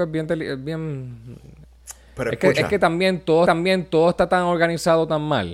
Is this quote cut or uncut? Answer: cut